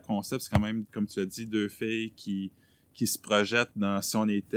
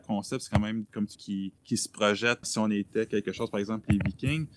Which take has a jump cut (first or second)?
second